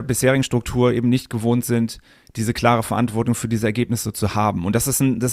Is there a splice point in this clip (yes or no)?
no